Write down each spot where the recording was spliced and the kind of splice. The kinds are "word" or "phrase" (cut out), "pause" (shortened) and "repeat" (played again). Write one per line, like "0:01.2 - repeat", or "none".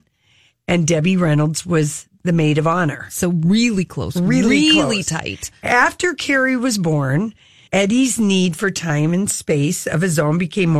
0:07.7 - phrase